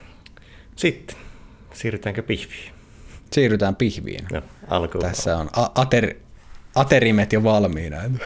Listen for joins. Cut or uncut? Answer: cut